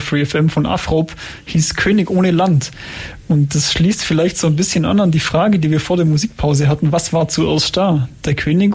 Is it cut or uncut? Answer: uncut